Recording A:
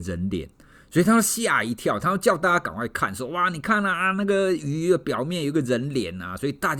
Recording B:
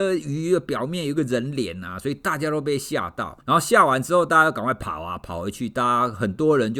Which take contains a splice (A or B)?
B